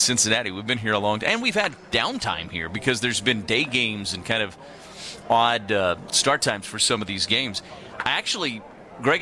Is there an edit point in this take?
no; 0 cuts

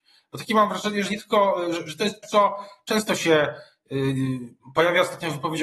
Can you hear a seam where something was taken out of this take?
yes; 2 cuts; at 1.1 s, 2.2 s

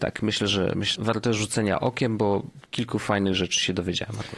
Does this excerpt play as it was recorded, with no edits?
no; 1 cut; at 0.9 s

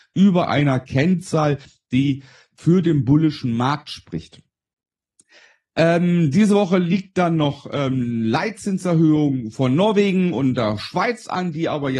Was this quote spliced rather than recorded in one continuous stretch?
no; 0 cuts

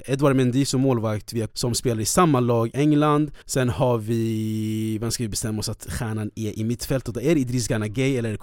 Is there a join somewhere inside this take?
yes; 3 cuts; at 1.5 s, 2.7 s, 3.4 s

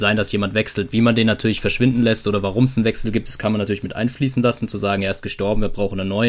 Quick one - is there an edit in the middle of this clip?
no; 0 cuts

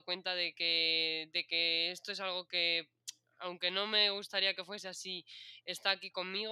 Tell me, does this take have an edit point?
no; 0 cuts

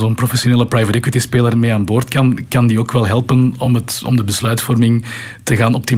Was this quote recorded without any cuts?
yes; 0 cuts

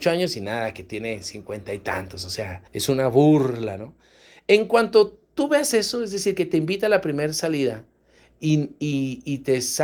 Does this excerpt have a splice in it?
yes; 1 cut; at 2.7 s

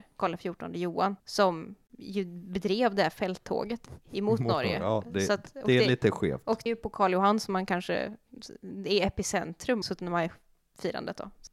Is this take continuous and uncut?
no; 3 cuts; at 1.2 s, 6.7 s, 9.8 s

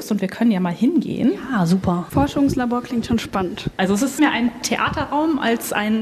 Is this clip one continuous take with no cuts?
no; 1 cut; at 4.2 s

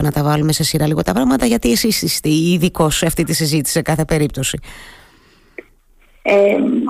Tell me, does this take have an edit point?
no; 0 cuts

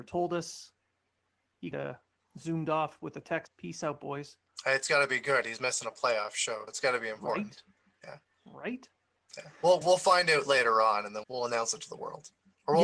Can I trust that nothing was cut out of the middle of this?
no; 6 cuts; at 1.7 s, 2.2 s, 3.5 s, 6.7 s, 9.8 s, 11.2 s

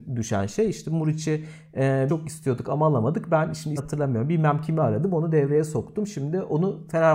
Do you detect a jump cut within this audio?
yes; 2 cuts; at 2.1 s, 3.8 s

